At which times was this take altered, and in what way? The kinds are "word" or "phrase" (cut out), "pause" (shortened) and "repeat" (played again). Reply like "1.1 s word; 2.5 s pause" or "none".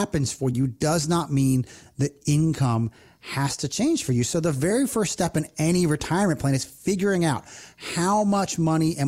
none

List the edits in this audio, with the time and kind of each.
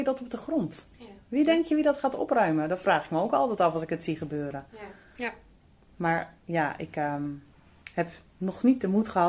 none

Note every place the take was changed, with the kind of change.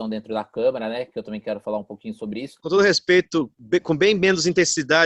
none

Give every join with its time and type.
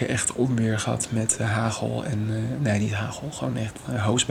none

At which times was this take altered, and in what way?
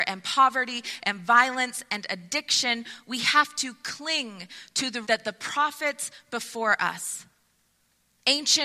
5.0 s word

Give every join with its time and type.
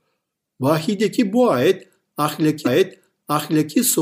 2.6 s repeat

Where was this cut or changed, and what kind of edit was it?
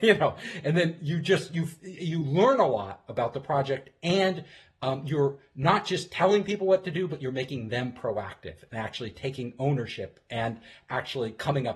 none

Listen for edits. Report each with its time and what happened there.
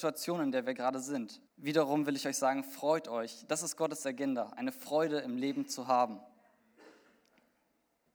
1.5 s pause

